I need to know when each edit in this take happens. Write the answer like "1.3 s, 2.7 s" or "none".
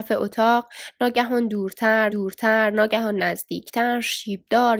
2.1 s